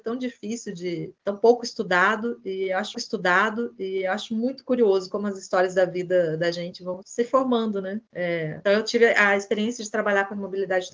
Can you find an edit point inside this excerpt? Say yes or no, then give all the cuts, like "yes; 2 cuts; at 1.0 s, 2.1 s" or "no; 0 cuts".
yes; 3 cuts; at 2.9 s, 7.0 s, 8.6 s